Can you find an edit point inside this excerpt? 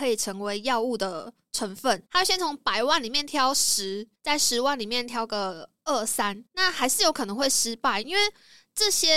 yes; 3 cuts; at 2.1 s, 4.2 s, 6.5 s

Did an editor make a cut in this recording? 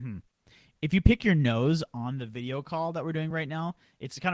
no; 0 cuts

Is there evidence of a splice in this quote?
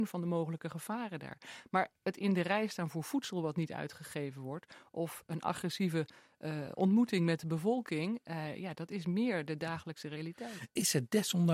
no; 0 cuts

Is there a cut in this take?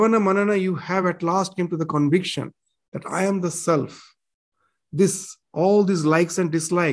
no; 0 cuts

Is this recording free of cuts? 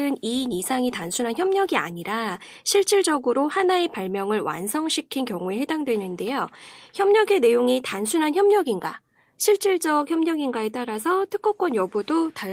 yes; 0 cuts

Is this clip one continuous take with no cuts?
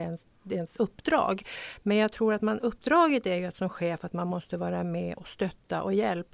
yes; 0 cuts

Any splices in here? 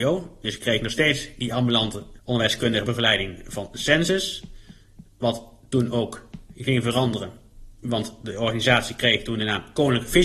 no; 0 cuts

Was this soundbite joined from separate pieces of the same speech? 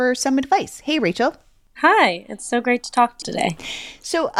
yes; 1 cut; at 3.2 s

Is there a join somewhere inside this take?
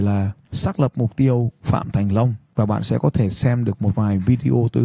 no; 0 cuts

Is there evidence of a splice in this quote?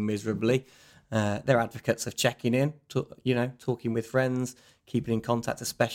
no; 0 cuts

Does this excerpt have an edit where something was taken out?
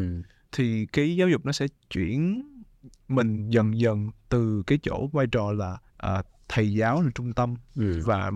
yes; 1 cut; at 5.9 s

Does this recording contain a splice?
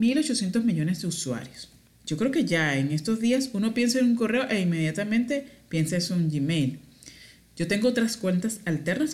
no; 0 cuts

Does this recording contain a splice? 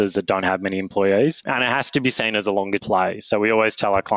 yes; 1 cut; at 2.8 s

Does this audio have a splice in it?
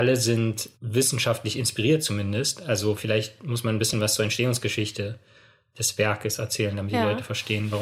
no; 0 cuts

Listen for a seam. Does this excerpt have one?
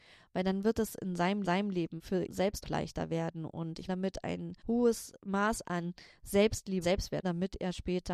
yes; 7 cuts; at 1.4 s, 2.3 s, 2.6 s, 3.9 s, 4.6 s, 6.8 s, 7.2 s

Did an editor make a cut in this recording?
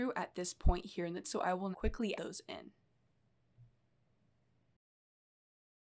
yes; 3 cuts; at 1.2 s, 1.7 s, 2.1 s

